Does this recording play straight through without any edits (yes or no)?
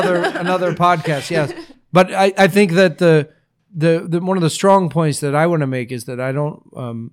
yes